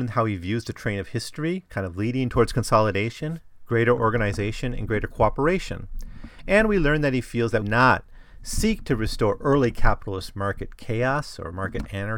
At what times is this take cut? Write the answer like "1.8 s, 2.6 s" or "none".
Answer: 7.6 s